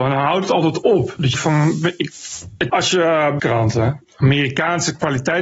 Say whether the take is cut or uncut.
cut